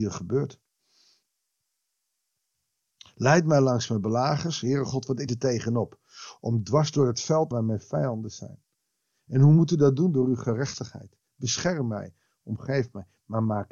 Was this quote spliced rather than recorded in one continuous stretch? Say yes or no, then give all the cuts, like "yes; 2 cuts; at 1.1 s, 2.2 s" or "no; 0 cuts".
yes; 2 cuts; at 5.3 s, 7.5 s